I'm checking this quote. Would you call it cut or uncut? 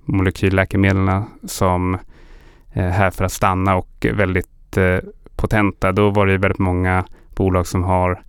uncut